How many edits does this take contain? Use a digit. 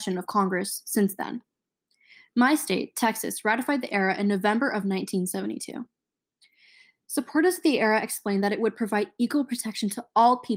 0